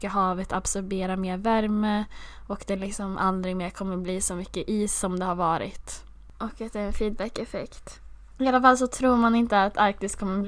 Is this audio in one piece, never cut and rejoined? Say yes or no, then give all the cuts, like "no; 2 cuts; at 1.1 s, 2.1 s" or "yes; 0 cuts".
yes; 0 cuts